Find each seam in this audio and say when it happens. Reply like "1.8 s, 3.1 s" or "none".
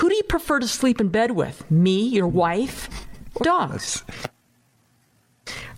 3.4 s